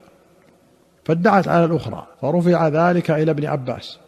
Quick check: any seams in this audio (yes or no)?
yes